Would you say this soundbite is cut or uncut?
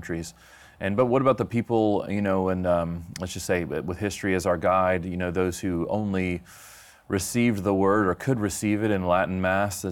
uncut